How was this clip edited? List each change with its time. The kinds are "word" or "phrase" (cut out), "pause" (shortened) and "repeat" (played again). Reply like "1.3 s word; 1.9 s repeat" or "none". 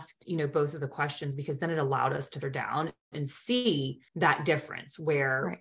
2.4 s word; 4.1 s pause